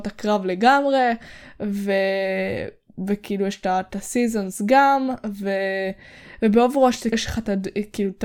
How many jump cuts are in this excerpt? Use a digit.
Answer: 1